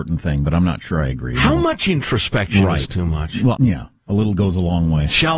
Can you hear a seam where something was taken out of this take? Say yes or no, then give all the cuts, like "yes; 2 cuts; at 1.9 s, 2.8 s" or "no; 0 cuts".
yes; 1 cut; at 3.6 s